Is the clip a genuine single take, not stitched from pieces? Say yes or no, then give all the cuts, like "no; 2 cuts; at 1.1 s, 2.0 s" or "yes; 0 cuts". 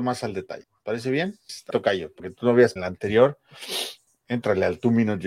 no; 2 cuts; at 1.7 s, 2.8 s